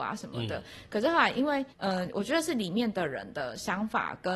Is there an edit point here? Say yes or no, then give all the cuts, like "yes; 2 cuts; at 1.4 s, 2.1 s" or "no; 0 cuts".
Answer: yes; 1 cut; at 1.7 s